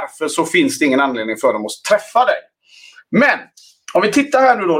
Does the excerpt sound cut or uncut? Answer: uncut